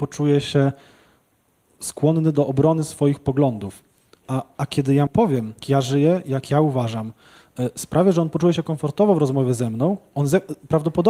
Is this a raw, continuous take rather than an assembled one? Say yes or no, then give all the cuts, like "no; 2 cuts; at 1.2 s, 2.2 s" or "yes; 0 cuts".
no; 2 cuts; at 5.1 s, 5.6 s